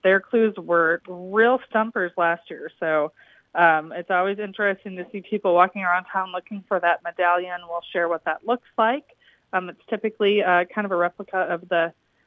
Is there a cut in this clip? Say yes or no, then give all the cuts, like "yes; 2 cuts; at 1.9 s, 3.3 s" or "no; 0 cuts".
no; 0 cuts